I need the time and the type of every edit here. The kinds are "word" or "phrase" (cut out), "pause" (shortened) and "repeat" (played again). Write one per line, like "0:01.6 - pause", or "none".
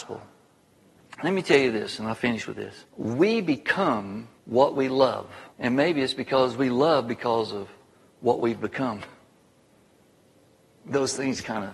0:02.9 - pause
0:04.4 - pause
0:05.5 - pause